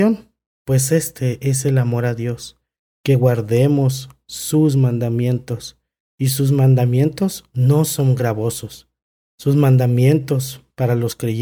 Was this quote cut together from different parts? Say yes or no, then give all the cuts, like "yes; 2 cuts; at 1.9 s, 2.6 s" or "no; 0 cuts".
no; 0 cuts